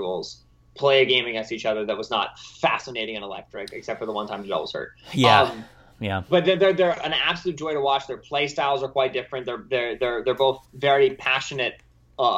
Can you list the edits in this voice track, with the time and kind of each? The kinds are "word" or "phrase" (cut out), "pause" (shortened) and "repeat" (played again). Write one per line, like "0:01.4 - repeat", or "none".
none